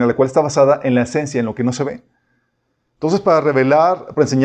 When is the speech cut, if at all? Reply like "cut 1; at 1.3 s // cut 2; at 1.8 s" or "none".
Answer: none